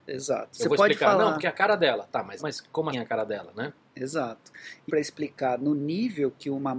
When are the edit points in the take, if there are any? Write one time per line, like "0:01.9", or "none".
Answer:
0:02.4
0:02.9
0:04.9